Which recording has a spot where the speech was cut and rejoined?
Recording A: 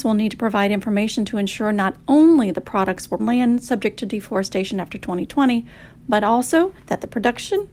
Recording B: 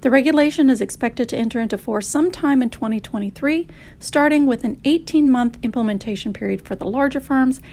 A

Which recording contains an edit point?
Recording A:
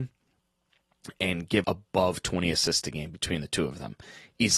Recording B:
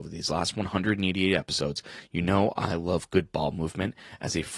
A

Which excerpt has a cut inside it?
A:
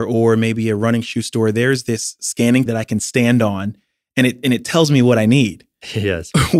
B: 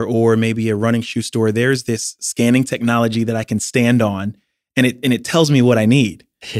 A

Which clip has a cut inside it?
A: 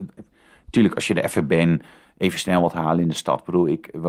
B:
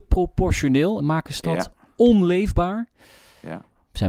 B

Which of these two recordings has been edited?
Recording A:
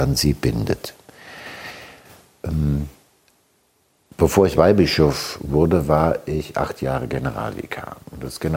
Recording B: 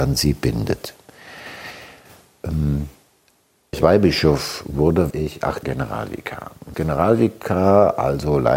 B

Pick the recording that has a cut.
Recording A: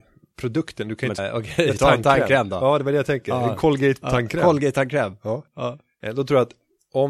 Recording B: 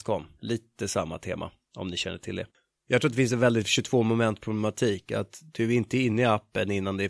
A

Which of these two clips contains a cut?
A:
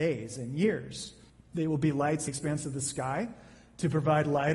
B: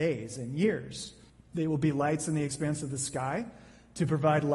A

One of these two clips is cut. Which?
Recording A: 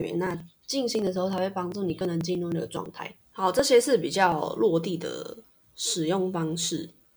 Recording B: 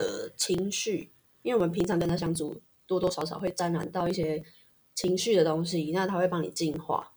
A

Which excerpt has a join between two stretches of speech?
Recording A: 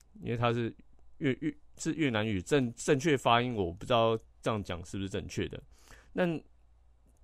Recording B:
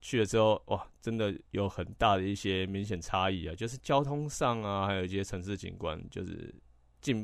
B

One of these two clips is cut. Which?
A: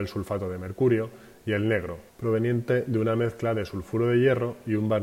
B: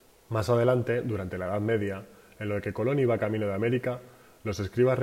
A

